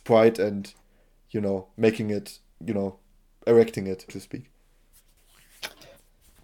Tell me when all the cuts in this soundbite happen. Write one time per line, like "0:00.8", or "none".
0:04.1